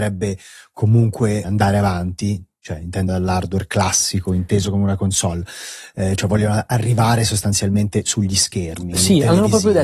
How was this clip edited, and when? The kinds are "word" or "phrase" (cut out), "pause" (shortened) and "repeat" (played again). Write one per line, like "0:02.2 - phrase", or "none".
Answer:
0:03.1 - word

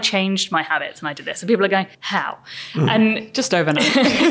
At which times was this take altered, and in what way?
0:01.9 - pause

